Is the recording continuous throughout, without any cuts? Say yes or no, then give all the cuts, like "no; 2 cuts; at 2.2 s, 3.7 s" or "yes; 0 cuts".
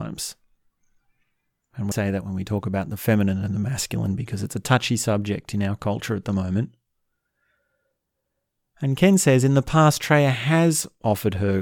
no; 1 cut; at 1.9 s